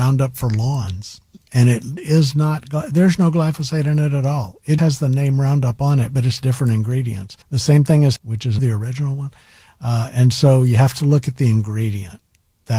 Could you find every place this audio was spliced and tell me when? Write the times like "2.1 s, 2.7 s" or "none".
4.8 s, 7.4 s, 8.2 s, 8.6 s